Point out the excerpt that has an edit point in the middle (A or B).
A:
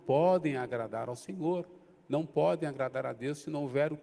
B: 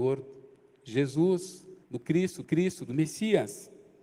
B